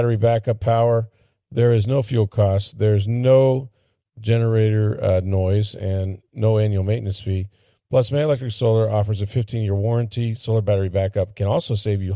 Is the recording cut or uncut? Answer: uncut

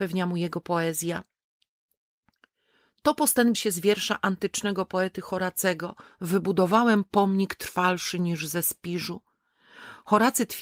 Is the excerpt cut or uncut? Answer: cut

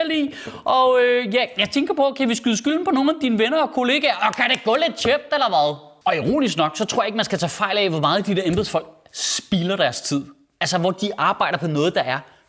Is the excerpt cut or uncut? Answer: uncut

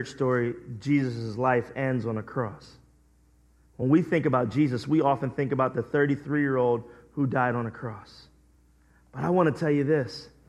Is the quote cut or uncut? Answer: uncut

